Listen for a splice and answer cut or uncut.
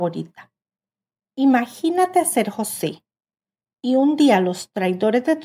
uncut